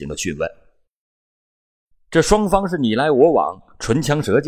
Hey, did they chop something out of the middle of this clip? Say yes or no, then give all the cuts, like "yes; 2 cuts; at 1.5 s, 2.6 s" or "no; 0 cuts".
no; 0 cuts